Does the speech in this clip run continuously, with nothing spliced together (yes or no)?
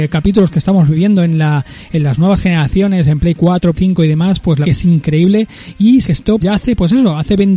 no